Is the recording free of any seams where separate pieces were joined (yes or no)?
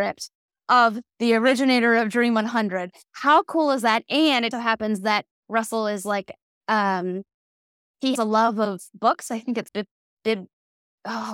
no